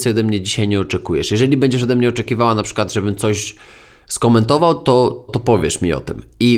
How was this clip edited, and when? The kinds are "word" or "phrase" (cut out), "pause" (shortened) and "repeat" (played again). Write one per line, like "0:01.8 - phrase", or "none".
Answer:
0:05.3 - word